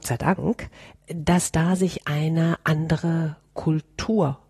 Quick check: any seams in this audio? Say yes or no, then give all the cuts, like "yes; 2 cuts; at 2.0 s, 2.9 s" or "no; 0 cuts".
no; 0 cuts